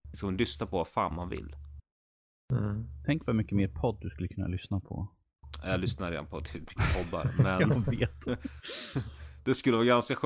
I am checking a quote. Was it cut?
no; 0 cuts

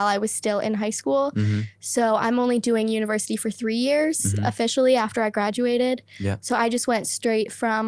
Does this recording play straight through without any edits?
yes; 0 cuts

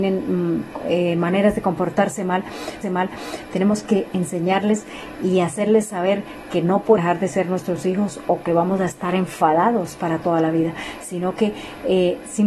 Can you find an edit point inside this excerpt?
yes; 2 cuts; at 2.8 s, 7.0 s

